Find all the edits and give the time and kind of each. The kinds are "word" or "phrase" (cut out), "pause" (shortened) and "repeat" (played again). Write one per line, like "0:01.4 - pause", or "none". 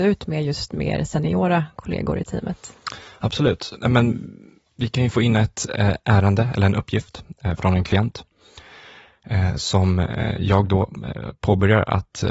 none